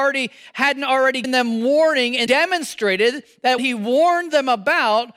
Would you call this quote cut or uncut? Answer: cut